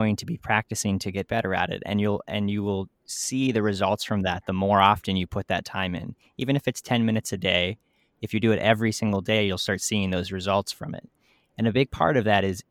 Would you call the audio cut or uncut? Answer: uncut